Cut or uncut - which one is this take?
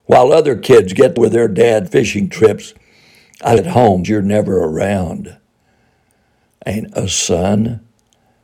cut